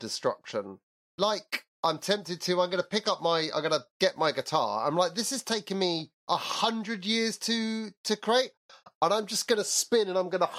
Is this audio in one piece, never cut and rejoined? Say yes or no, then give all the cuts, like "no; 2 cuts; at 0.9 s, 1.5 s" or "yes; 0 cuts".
no; 2 cuts; at 1.7 s, 6.2 s